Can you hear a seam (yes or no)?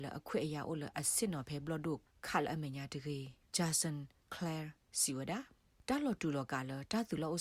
no